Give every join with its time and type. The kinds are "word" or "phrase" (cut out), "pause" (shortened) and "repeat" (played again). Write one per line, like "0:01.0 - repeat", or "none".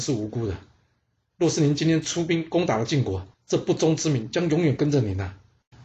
0:03.3 - pause